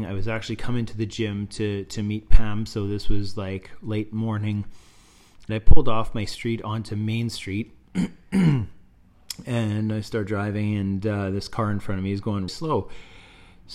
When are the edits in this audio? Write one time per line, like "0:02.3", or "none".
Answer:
0:05.5
0:12.5